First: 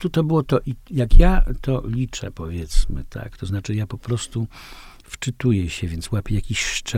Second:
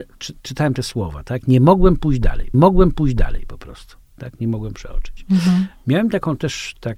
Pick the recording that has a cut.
second; 1 cut; at 2.5 s

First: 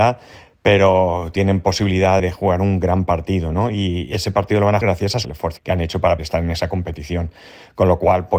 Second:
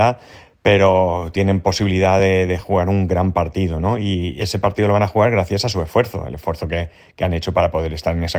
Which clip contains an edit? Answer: first; 5 cuts; at 2.2 s, 4.8 s, 5.2 s, 5.6 s, 6.2 s

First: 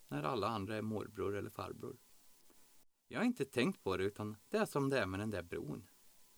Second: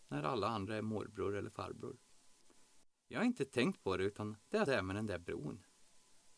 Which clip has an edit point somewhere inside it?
second; 1 cut; at 4.7 s

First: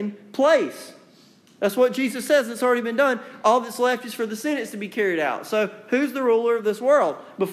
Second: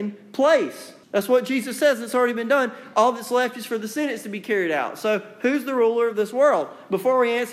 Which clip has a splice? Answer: second; 1 cut; at 1.0 s

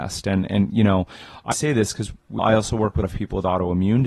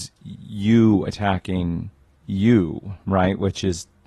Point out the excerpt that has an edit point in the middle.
first; 3 cuts; at 1.5 s, 2.4 s, 3.0 s

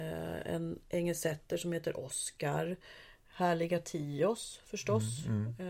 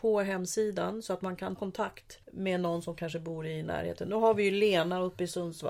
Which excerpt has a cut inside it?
second; 2 cuts; at 1.6 s, 2.2 s

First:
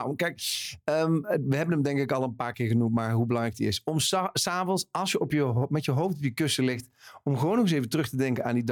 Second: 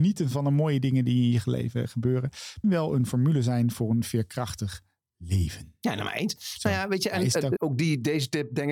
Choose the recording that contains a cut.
second; 2 cuts; at 2.6 s, 7.6 s

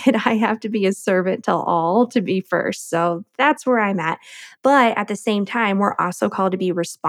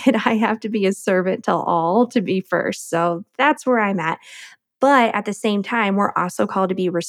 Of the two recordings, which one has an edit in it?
first; 1 cut; at 4.6 s

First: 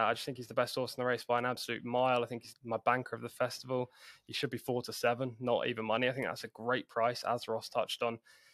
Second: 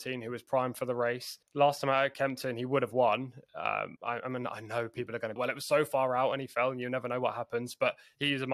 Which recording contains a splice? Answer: second; 3 cuts; at 1.4 s, 4.0 s, 5.4 s

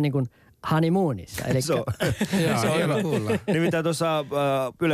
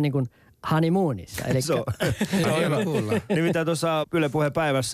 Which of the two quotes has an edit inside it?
second; 2 cuts; at 2.4 s, 4.0 s

